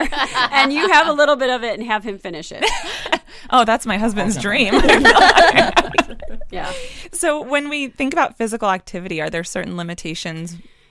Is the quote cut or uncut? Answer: uncut